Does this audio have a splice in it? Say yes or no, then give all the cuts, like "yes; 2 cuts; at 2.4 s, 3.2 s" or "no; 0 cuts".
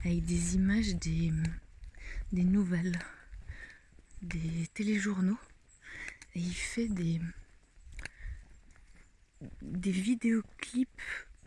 no; 0 cuts